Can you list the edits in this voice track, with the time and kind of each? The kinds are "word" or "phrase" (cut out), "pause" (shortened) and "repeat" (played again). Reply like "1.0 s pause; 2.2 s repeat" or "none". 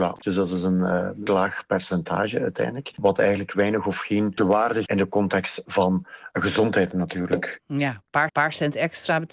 1.3 s word; 4.4 s word; 4.9 s word; 8.3 s repeat